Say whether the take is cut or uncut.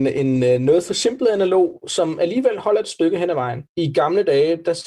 cut